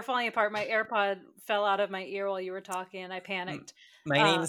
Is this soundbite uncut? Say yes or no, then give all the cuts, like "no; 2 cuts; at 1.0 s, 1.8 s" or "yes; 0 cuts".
yes; 0 cuts